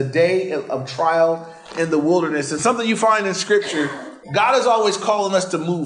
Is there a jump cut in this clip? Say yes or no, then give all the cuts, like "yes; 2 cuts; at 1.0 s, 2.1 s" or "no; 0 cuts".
yes; 1 cut; at 4.2 s